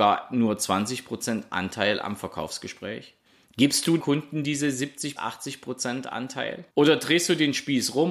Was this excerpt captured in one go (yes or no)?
no